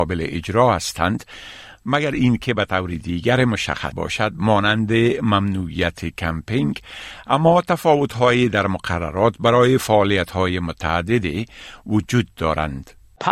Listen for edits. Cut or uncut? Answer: cut